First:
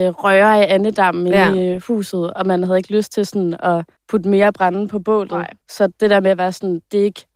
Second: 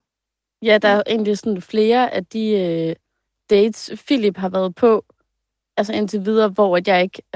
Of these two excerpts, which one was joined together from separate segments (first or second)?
first